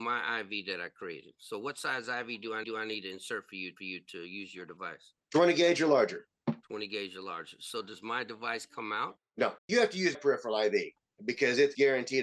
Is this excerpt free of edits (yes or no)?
no